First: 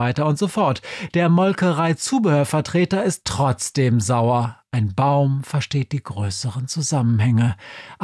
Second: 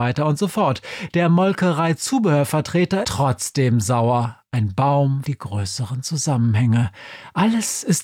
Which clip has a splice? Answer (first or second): second